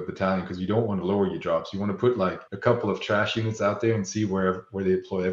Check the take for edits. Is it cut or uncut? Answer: cut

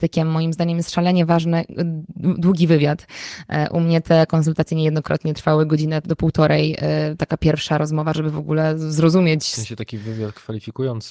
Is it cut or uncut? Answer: uncut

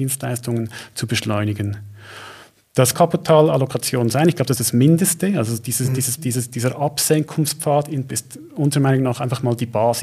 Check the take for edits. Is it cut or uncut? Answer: cut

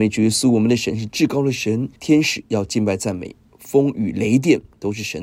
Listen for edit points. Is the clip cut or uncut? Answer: cut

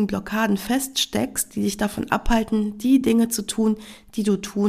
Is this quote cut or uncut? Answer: uncut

